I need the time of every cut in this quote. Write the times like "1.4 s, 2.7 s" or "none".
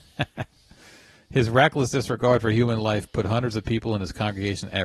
none